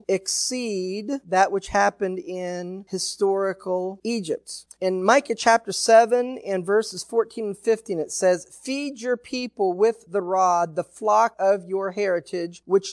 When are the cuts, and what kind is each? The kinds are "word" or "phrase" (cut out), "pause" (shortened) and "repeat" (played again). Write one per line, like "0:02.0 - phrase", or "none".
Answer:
none